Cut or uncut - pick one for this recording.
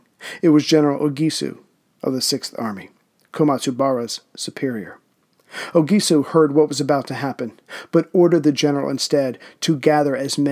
uncut